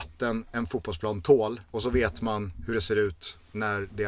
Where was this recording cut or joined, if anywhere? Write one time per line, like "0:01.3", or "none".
0:01.7